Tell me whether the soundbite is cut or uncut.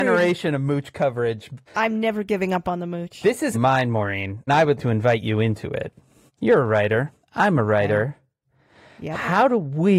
cut